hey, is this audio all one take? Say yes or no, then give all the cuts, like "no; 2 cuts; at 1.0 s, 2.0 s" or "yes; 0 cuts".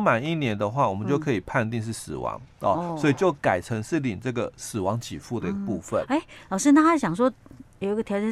yes; 0 cuts